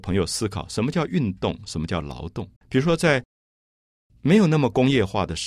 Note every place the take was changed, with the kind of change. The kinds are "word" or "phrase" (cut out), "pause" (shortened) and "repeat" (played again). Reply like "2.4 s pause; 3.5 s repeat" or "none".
2.6 s pause